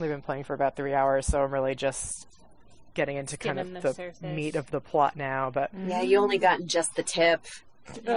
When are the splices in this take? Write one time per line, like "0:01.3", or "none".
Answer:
none